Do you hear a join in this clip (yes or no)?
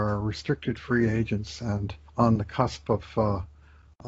yes